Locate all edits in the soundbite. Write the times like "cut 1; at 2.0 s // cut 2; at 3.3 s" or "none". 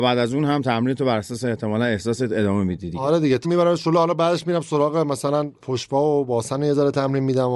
cut 1; at 3.4 s

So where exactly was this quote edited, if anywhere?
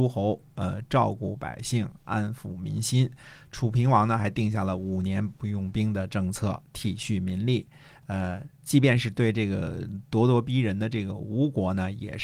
cut 1; at 8.5 s

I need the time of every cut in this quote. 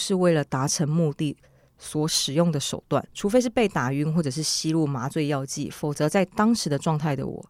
cut 1; at 3.1 s

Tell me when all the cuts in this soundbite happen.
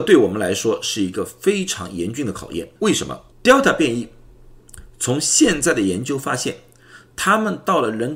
cut 1; at 2.8 s // cut 2; at 3.3 s

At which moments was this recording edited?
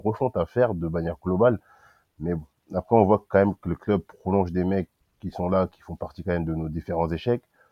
cut 1; at 5.0 s

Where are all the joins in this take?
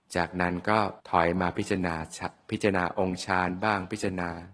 cut 1; at 1.0 s

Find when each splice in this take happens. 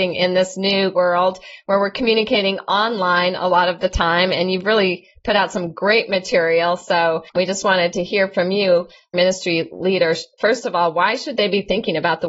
cut 1; at 0.9 s // cut 2; at 7.3 s // cut 3; at 9.1 s

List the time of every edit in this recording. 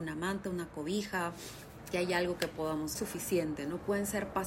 cut 1; at 1.9 s // cut 2; at 3.0 s

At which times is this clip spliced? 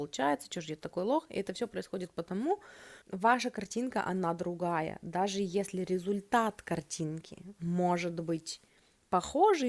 cut 1; at 3.0 s

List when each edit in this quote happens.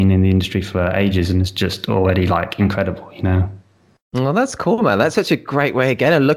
none

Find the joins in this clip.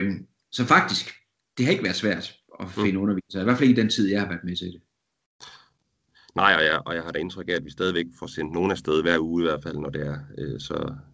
none

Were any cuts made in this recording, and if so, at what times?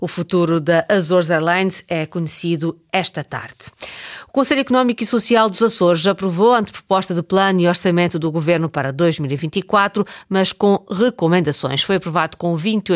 none

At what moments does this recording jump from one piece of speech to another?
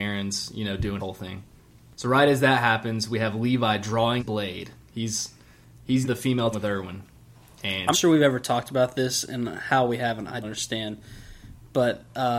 cut 1; at 1.0 s // cut 2; at 4.2 s // cut 3; at 6.0 s // cut 4; at 6.5 s // cut 5; at 7.9 s // cut 6; at 10.4 s

